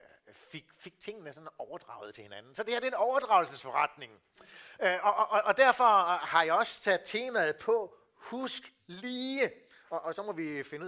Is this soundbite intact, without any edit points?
yes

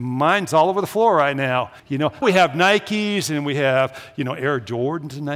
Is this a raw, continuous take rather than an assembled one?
no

